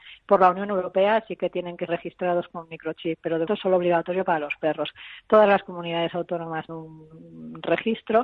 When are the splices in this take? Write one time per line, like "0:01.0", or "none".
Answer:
0:01.9
0:03.5
0:06.7